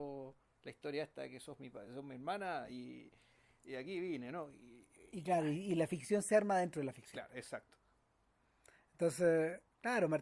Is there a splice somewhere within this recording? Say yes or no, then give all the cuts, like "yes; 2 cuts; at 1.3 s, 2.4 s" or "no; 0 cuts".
no; 0 cuts